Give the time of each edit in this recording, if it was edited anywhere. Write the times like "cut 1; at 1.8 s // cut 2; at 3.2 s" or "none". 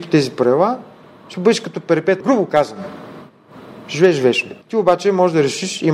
cut 1; at 2.2 s // cut 2; at 4.6 s